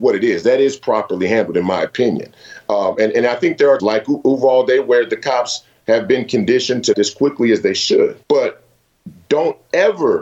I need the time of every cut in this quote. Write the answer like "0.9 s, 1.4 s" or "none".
3.8 s, 6.9 s, 8.2 s